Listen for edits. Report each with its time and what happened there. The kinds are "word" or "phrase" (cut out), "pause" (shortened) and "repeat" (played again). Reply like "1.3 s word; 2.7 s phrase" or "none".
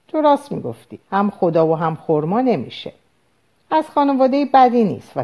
1.0 s pause